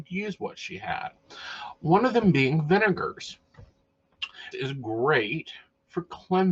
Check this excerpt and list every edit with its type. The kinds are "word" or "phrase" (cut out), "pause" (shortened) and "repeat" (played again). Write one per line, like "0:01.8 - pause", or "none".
0:04.5 - word